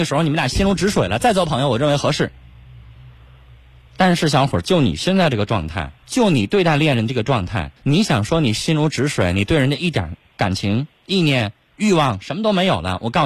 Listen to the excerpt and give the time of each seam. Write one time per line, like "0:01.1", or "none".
0:06.0
0:07.8